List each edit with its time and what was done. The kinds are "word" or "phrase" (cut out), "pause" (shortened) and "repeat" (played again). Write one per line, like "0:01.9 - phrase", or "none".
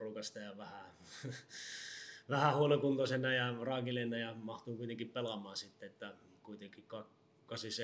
none